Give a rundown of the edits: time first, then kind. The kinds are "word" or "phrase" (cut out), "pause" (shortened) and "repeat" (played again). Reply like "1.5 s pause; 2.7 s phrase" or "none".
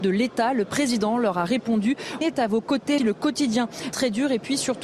2.2 s word; 3.0 s phrase; 3.9 s word